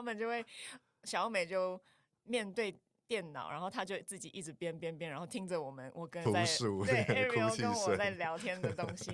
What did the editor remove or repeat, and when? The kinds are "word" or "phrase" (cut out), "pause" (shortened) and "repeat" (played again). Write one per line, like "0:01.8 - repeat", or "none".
0:06.3 - word